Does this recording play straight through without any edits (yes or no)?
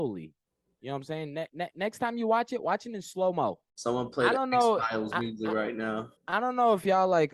no